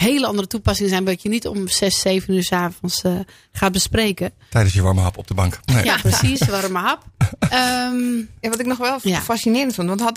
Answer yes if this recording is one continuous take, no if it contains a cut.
yes